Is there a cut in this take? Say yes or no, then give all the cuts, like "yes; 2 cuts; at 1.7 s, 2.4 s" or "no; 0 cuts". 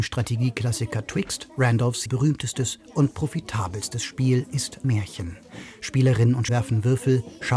yes; 3 cuts; at 2.1 s, 4.8 s, 6.5 s